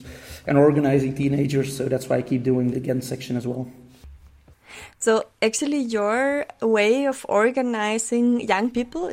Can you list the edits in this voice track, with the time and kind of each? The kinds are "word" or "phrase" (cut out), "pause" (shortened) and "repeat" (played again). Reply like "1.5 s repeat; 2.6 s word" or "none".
2.7 s word; 5.3 s pause